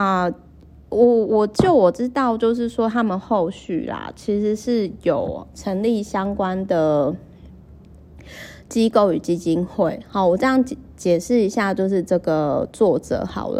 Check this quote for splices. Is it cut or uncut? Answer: uncut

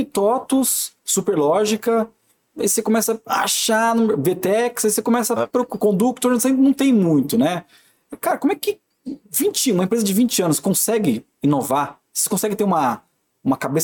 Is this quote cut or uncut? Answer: cut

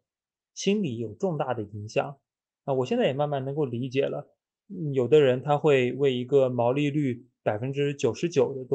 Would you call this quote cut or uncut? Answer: uncut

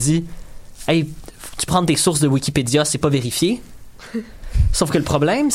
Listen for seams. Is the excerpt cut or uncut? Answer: cut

